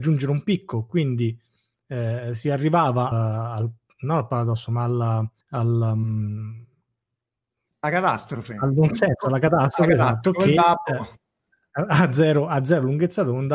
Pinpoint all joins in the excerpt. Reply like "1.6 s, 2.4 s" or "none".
3.1 s, 5.4 s